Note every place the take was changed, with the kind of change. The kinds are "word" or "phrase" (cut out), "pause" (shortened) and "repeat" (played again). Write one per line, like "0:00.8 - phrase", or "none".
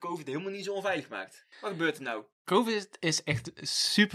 0:01.5 - pause